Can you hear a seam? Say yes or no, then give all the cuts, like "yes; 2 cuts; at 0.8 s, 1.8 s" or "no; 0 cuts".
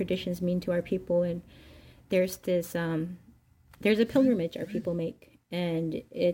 no; 0 cuts